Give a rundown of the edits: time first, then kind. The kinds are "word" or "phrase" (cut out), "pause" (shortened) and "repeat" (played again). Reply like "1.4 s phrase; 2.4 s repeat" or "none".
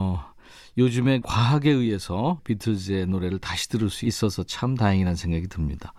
1.2 s phrase; 2.4 s word